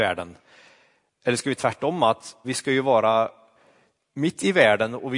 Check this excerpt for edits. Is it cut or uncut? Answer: cut